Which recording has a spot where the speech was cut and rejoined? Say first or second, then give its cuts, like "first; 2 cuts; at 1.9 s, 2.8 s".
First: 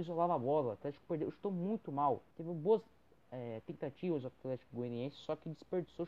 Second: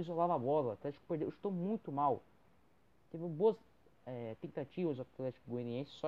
first; 1 cut; at 2.3 s